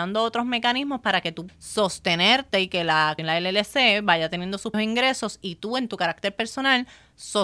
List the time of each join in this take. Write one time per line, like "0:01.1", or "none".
0:01.5
0:03.2
0:04.7